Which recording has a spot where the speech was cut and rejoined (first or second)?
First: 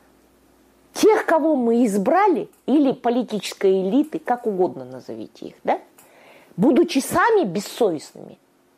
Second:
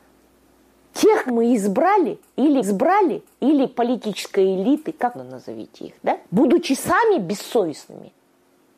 second